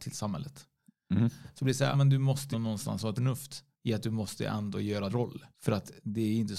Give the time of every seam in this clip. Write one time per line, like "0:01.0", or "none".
0:01.9
0:02.5
0:03.2
0:03.7
0:05.1
0:05.5